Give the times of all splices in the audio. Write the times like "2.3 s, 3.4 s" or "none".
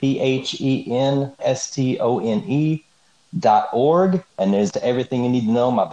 1.4 s, 4.3 s, 4.7 s